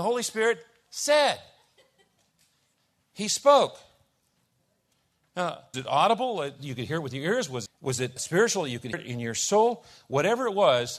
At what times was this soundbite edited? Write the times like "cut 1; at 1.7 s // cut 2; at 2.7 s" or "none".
cut 1; at 5.7 s // cut 2; at 7.7 s // cut 3; at 8.2 s // cut 4; at 8.9 s